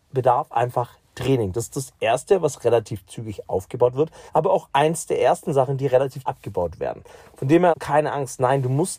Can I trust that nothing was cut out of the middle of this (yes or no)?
no